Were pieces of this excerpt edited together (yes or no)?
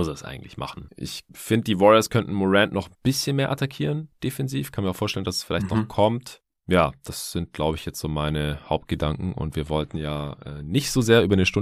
no